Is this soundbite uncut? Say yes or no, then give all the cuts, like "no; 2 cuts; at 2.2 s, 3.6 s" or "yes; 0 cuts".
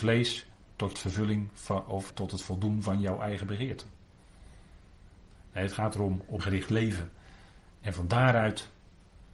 no; 3 cuts; at 0.9 s, 2.1 s, 6.4 s